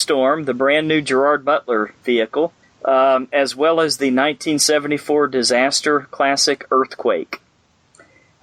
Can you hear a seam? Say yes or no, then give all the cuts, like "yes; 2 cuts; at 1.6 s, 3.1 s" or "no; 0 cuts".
yes; 1 cut; at 2.6 s